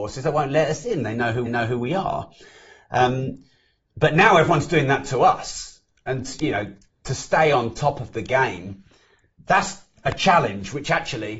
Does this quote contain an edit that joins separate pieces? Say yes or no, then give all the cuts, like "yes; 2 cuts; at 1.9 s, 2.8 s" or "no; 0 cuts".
yes; 1 cut; at 1.5 s